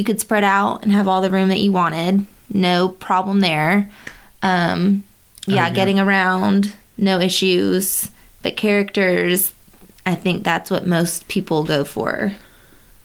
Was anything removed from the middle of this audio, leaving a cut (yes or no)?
no